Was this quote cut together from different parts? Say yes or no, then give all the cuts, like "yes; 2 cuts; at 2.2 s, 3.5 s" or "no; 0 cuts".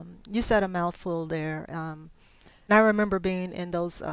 yes; 1 cut; at 2.7 s